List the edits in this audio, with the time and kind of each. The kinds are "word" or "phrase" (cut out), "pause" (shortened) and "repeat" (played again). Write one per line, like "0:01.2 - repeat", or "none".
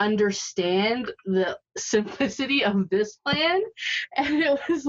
none